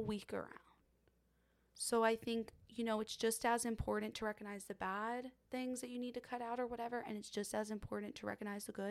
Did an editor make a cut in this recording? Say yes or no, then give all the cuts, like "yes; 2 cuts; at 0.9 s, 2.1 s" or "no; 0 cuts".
no; 0 cuts